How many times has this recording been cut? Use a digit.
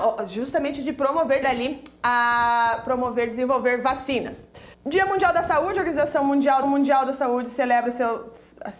3